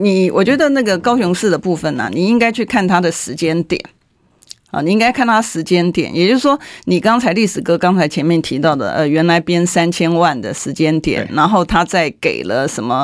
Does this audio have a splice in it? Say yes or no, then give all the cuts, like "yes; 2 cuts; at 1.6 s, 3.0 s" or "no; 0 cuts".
no; 0 cuts